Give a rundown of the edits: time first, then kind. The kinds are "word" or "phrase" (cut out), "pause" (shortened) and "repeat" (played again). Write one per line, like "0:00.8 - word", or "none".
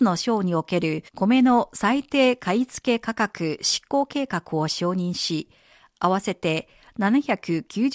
0:01.1 - pause

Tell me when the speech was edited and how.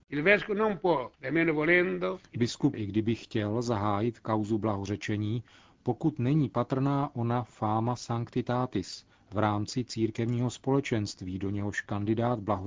0:02.7 - word

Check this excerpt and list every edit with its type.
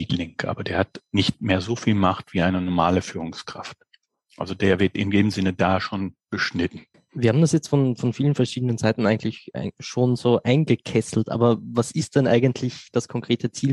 none

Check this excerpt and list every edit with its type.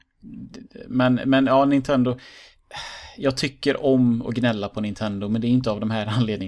none

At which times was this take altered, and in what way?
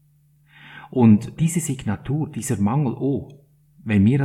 0:01.4 - word

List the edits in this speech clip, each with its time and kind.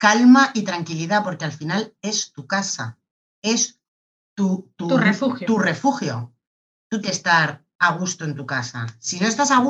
0:07.0 - word

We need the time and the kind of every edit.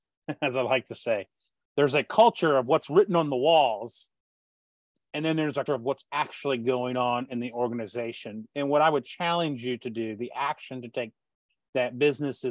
0:05.7 - word

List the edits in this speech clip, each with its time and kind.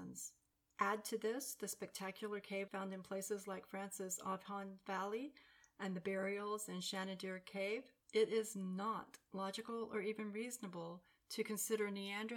0:02.7 - word

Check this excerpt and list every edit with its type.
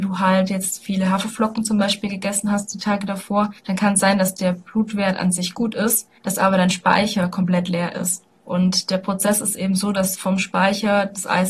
0:03.6 - pause
0:06.2 - pause
0:08.4 - pause

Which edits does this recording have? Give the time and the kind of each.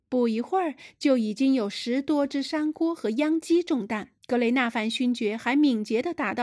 0:04.2 - pause

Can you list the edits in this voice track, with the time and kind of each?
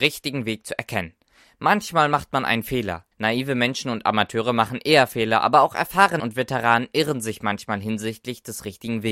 0:03.1 - pause
0:06.2 - word

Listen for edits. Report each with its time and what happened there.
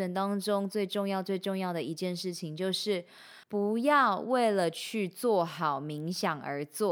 0:03.4 - pause

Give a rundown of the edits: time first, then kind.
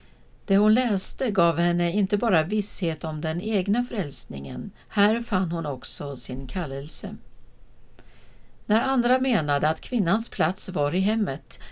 0:04.8 - pause

